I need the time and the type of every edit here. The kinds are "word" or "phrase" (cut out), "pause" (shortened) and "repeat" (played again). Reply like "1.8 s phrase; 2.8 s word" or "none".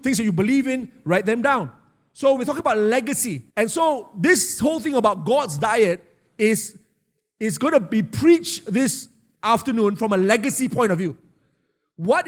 3.5 s pause